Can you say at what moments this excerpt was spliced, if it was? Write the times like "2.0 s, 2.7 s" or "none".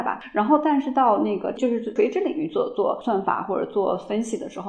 1.6 s